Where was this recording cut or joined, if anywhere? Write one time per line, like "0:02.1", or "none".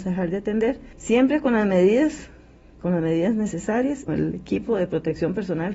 0:00.9
0:04.1